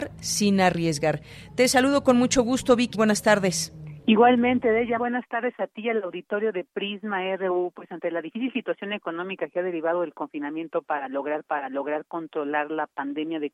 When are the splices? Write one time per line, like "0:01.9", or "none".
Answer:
0:02.9
0:05.0
0:11.4